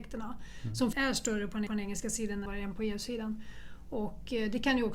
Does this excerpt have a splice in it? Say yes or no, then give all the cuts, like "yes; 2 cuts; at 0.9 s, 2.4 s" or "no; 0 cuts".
yes; 3 cuts; at 0.9 s, 1.7 s, 2.5 s